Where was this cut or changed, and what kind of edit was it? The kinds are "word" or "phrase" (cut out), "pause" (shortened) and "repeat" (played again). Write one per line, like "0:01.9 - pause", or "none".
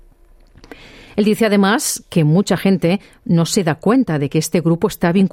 none